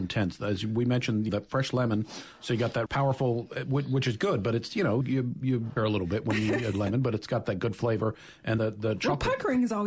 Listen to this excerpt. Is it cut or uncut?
cut